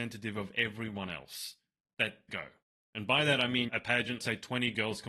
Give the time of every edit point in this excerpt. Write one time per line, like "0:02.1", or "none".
0:02.3
0:02.6
0:03.7
0:04.2